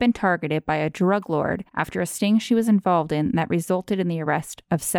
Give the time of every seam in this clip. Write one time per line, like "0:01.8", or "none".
0:01.7